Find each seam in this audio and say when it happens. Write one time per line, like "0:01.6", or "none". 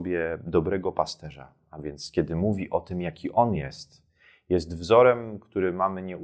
none